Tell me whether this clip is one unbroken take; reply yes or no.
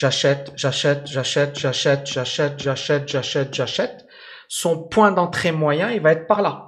yes